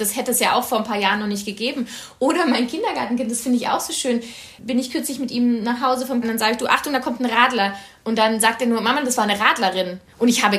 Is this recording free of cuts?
no; 2 cuts; at 4.6 s, 6.2 s

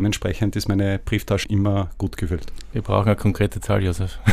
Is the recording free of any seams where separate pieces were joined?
no; 1 cut; at 1.4 s

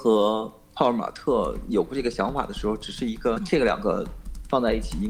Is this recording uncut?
yes; 0 cuts

